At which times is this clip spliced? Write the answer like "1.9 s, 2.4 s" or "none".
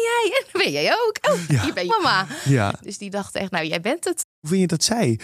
1.5 s, 1.9 s